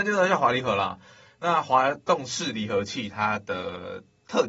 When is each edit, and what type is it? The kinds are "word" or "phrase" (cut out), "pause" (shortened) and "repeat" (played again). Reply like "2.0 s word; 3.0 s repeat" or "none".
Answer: none